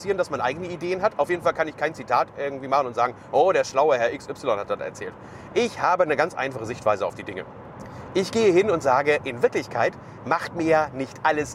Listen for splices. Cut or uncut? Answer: uncut